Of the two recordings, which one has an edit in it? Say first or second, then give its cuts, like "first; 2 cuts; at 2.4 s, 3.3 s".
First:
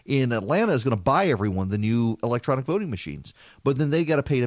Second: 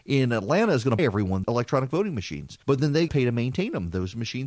second; 4 cuts; at 1.0 s, 1.4 s, 2.6 s, 3.1 s